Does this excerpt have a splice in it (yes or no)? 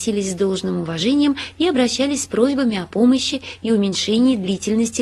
no